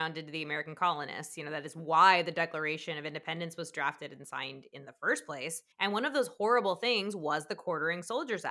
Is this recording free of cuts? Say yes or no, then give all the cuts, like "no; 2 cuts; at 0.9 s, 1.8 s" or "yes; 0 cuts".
no; 1 cut; at 5.7 s